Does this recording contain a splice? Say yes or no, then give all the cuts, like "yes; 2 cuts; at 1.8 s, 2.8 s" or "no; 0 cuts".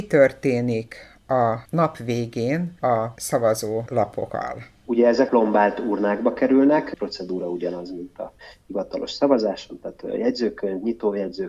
yes; 1 cut; at 5.3 s